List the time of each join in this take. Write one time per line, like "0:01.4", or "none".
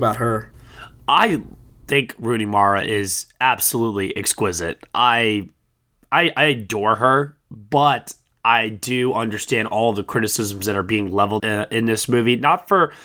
0:11.4